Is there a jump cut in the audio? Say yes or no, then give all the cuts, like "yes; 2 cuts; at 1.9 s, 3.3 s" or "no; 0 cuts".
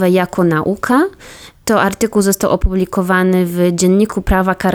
no; 0 cuts